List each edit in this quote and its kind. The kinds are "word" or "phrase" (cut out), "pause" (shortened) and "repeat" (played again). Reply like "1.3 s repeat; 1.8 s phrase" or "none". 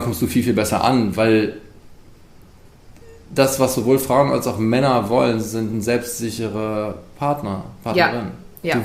none